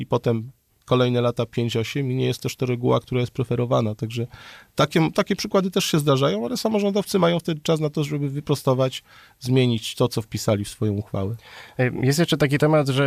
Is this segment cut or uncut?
uncut